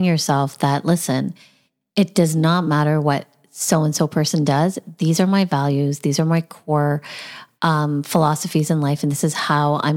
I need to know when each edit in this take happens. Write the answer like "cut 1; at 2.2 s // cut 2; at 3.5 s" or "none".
none